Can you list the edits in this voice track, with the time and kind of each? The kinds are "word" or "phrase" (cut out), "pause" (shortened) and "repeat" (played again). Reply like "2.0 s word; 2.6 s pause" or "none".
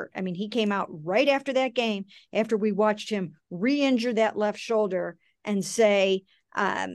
none